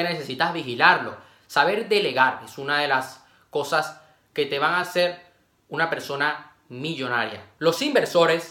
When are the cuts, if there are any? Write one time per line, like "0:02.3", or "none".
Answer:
none